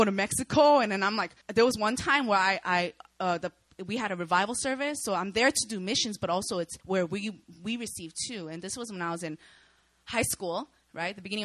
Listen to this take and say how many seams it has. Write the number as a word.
two